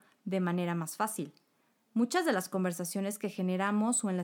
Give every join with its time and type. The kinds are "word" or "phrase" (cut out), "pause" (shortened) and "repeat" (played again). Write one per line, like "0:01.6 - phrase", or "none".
none